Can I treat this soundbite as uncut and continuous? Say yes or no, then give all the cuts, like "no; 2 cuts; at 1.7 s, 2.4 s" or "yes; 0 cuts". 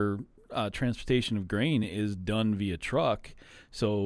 yes; 0 cuts